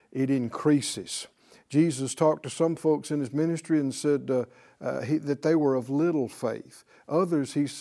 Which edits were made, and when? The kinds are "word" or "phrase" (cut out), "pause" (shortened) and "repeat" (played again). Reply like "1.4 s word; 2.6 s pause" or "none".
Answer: none